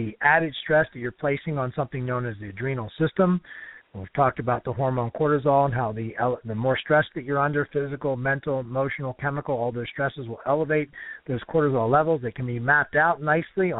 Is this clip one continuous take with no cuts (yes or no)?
yes